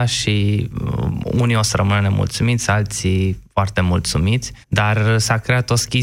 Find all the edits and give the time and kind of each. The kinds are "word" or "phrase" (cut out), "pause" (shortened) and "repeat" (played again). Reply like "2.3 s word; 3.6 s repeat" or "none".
3.5 s pause; 4.6 s pause